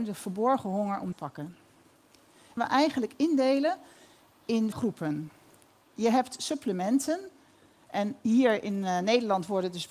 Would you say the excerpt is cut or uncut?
cut